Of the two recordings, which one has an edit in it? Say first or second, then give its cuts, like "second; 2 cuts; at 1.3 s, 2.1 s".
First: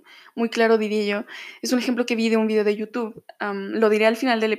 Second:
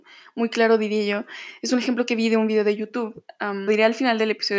second; 1 cut; at 3.7 s